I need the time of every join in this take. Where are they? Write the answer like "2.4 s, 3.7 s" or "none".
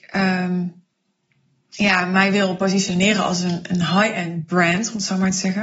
none

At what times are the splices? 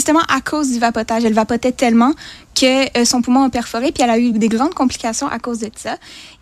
none

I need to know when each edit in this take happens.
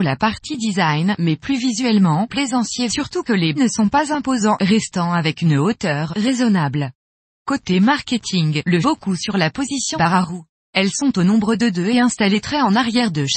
2.3 s, 2.9 s, 3.6 s, 7.2 s, 8.8 s, 9.9 s, 10.6 s

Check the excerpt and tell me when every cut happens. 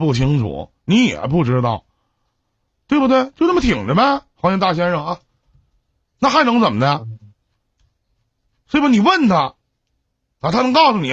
none

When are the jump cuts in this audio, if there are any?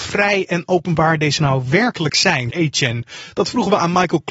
1.4 s, 2.5 s

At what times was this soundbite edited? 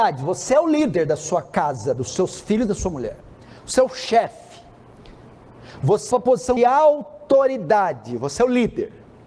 6.1 s, 6.6 s

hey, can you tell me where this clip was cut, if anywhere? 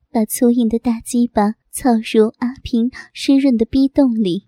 1.6 s

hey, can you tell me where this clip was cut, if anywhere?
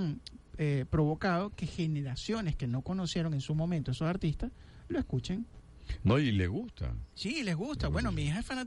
7.1 s

